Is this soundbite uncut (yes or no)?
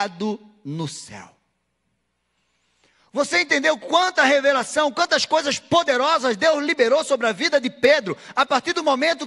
yes